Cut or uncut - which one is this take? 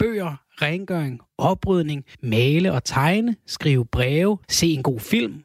cut